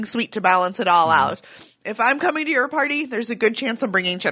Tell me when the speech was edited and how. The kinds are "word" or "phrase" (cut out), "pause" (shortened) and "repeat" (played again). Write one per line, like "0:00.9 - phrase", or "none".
none

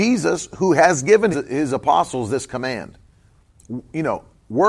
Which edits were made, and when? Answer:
0:01.3 - word

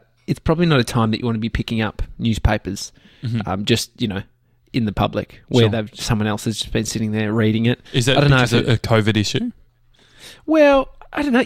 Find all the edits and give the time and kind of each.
0:07.9 - pause

